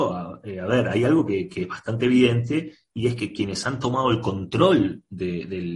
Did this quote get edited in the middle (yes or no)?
no